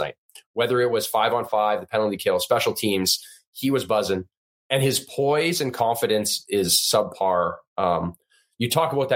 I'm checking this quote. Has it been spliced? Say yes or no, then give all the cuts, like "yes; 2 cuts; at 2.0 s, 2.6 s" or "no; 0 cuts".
no; 0 cuts